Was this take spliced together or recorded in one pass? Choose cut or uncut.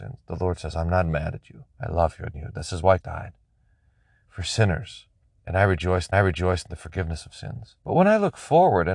cut